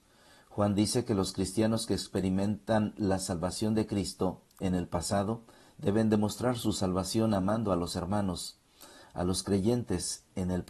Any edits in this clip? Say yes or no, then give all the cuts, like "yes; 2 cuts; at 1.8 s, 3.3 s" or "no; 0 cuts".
no; 0 cuts